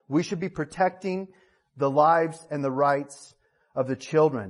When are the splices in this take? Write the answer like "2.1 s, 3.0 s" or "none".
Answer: none